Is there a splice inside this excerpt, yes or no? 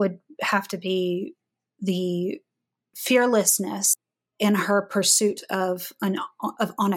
no